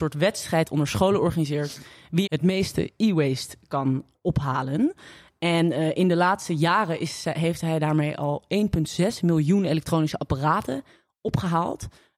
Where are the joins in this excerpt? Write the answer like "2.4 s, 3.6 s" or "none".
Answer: 2.3 s